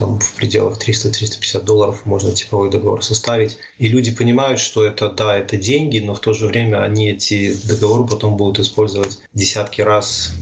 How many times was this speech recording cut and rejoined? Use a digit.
2